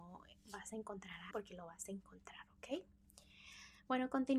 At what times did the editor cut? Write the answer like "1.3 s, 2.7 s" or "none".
1.3 s